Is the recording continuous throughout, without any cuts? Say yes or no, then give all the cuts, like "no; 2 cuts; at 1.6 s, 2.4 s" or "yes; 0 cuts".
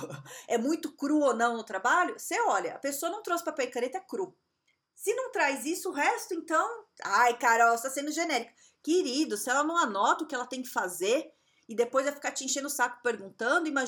yes; 0 cuts